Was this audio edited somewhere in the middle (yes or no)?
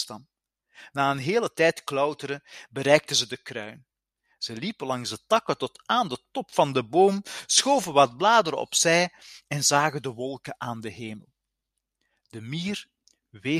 no